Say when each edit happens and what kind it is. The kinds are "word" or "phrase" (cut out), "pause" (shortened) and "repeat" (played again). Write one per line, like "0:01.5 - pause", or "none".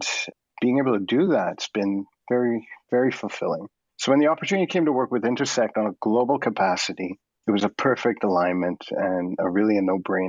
none